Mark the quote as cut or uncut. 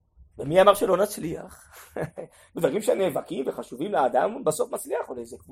uncut